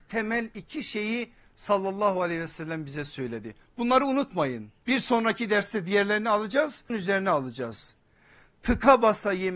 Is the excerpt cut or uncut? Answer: cut